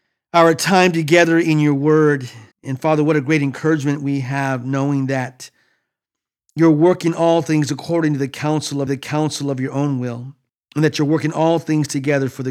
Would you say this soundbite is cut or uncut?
cut